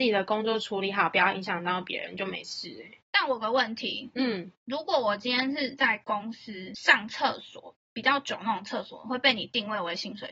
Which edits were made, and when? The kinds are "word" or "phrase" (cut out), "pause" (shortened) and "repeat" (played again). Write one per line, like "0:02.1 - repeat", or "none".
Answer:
0:04.6 - pause